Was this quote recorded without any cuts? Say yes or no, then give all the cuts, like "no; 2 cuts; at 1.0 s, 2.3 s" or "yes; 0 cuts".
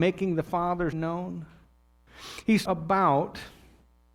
no; 2 cuts; at 0.9 s, 2.7 s